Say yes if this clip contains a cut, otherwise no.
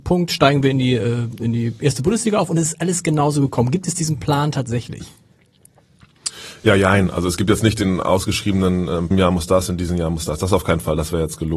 yes